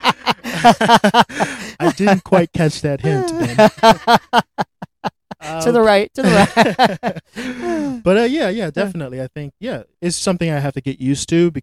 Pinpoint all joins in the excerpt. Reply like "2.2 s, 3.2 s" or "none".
10.2 s